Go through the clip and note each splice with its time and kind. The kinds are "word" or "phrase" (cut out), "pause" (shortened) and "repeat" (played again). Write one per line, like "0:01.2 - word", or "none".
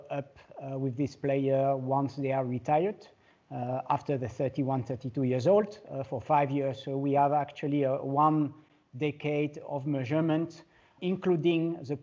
0:11.0 - word

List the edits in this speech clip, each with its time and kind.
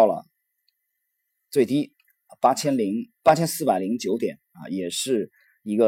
0:03.2 - pause
0:04.4 - pause

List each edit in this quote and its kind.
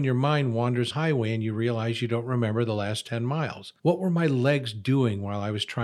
0:00.9 - phrase
0:03.8 - pause

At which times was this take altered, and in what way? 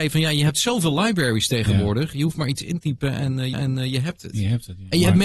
0:02.8 - word
0:03.5 - repeat

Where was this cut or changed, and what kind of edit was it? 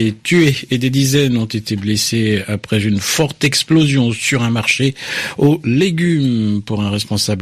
none

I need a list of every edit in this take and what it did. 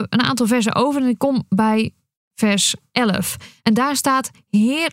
none

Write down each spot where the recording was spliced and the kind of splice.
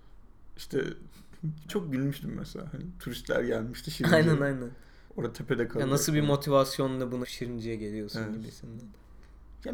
0:01.7 - word
0:05.1 - pause
0:07.2 - word

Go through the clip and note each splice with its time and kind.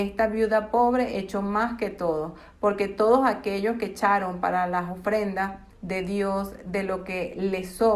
0:05.7 - pause

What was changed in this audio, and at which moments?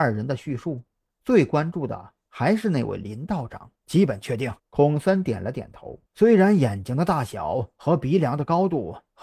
0:03.8 - pause
0:04.6 - pause
0:06.1 - pause

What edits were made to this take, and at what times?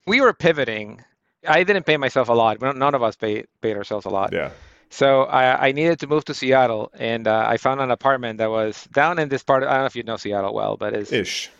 none

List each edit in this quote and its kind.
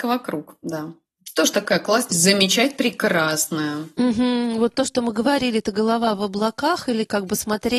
0:02.1 - word
0:04.7 - word

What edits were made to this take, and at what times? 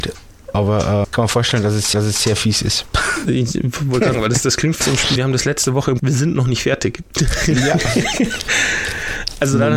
0:01.0 - word
0:01.9 - repeat
0:04.1 - word
0:04.8 - phrase
0:05.2 - phrase
0:06.0 - phrase

